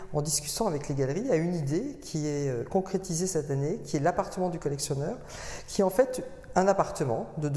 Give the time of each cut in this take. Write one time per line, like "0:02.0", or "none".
none